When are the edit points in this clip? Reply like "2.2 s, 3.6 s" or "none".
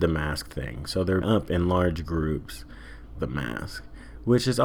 1.2 s, 3.1 s